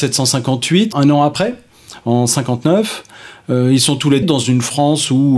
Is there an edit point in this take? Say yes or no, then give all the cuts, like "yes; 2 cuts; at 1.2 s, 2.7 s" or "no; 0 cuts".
yes; 2 cuts; at 0.9 s, 4.2 s